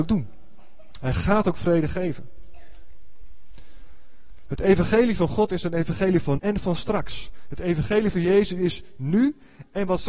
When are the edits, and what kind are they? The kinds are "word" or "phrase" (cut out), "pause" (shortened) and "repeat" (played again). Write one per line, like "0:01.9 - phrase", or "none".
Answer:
0:06.4 - word